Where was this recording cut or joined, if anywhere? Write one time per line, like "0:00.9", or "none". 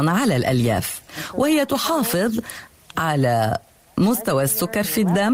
none